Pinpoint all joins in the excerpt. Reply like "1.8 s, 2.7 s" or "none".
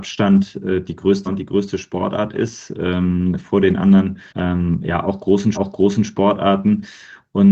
1.3 s, 4.3 s, 5.5 s